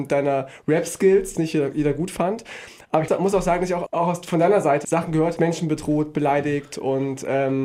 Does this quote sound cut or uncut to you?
cut